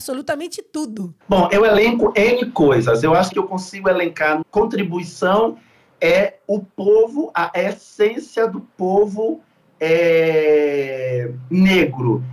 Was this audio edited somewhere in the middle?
yes; 3 cuts; at 1.2 s, 3.3 s, 4.4 s

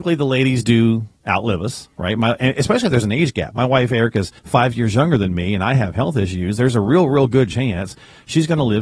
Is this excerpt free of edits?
no; 2 cuts; at 1.2 s, 4.4 s

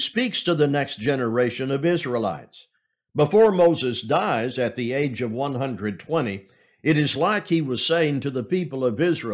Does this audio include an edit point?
no; 0 cuts

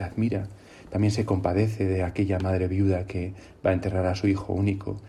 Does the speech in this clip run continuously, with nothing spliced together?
yes; 0 cuts

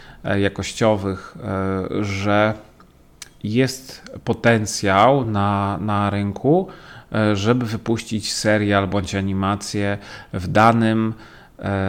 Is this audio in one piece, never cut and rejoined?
yes; 0 cuts

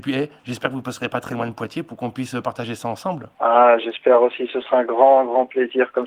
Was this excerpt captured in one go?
no; 1 cut; at 3.3 s

